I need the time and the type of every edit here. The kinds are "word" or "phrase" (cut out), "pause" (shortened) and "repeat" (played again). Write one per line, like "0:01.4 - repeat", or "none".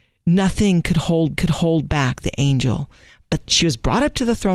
0:01.4 - repeat
0:03.5 - word